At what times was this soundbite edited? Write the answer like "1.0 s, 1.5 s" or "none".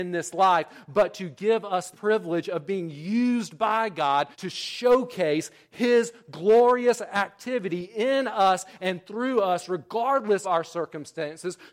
1.9 s, 4.3 s, 10.4 s